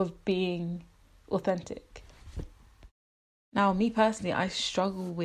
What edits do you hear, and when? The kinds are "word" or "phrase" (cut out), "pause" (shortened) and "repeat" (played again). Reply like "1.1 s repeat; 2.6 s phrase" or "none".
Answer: none